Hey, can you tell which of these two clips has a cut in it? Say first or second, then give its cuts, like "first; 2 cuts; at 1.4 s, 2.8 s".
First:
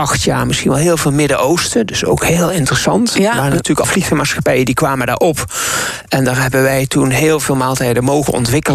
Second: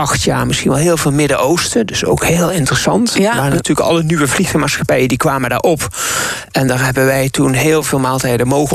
first; 1 cut; at 3.8 s